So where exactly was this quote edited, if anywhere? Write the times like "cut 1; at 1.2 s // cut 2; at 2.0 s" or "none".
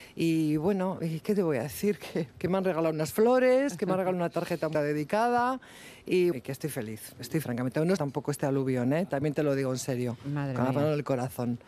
cut 1; at 2.3 s // cut 2; at 4.7 s // cut 3; at 6.3 s // cut 4; at 7.4 s // cut 5; at 8.0 s